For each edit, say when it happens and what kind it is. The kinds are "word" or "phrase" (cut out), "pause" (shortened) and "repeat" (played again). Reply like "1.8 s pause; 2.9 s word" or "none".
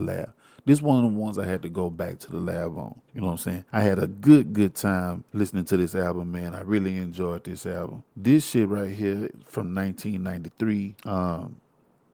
3.1 s pause; 3.7 s pause; 5.3 s pause; 8.1 s pause; 11.0 s pause